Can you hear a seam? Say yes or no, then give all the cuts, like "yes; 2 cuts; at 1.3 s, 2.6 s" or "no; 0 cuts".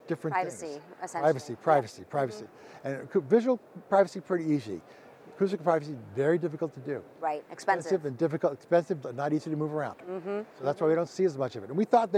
yes; 1 cut; at 9.0 s